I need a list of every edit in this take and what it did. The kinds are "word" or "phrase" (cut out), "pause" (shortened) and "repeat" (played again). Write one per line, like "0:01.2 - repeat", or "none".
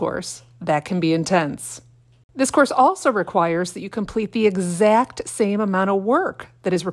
none